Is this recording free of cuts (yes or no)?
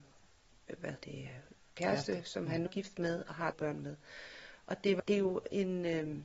no